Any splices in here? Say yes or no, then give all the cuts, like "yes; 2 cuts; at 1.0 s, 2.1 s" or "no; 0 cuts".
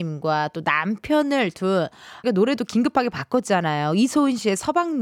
yes; 1 cut; at 2.2 s